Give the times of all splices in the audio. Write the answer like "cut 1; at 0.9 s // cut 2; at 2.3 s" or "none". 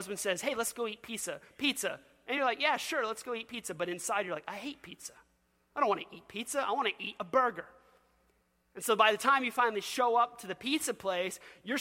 none

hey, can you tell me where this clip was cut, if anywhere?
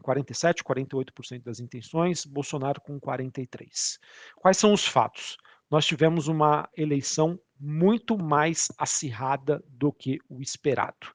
none

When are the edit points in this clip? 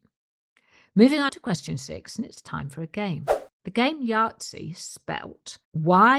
cut 1; at 1.3 s

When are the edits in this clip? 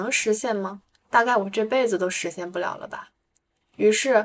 cut 1; at 1.0 s

